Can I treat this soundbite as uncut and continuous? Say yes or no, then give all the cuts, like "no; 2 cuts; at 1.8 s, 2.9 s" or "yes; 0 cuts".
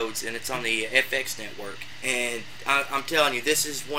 no; 1 cut; at 1.9 s